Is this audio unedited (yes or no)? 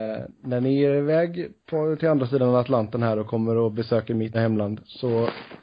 no